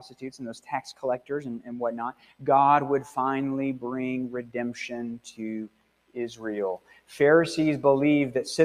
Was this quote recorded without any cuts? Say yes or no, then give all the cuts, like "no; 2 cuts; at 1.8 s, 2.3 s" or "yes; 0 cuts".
yes; 0 cuts